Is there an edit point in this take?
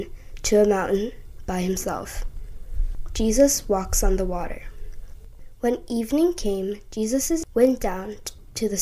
yes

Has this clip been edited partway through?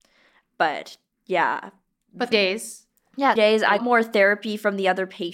yes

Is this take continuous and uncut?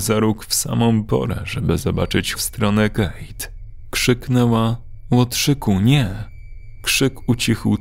no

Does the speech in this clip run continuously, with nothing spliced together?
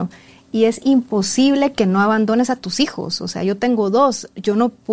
yes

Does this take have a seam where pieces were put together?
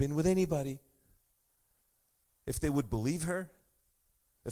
no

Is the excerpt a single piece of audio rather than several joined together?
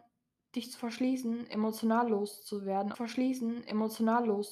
no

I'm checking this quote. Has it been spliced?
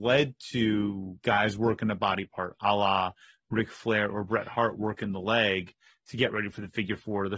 no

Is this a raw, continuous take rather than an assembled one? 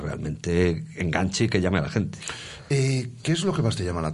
yes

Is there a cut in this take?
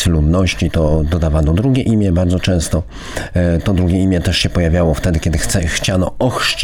no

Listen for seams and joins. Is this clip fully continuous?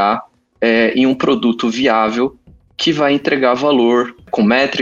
yes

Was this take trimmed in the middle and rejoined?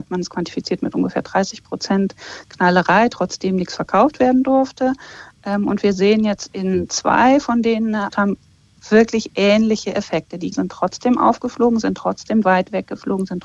yes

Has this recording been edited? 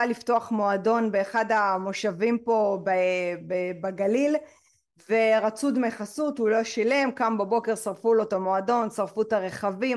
no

